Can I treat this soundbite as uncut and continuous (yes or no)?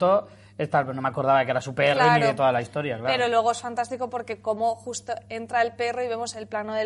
yes